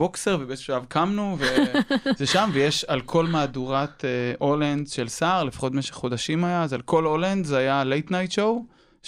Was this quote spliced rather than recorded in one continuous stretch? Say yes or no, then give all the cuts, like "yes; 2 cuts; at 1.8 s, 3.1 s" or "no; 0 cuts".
no; 0 cuts